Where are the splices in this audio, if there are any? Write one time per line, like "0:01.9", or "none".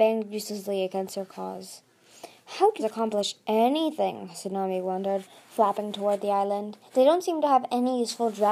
0:02.8
0:06.9